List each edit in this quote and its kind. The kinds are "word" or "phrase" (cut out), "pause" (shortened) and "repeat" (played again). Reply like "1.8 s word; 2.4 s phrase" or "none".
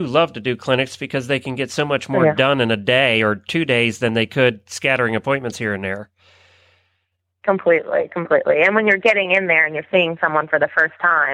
none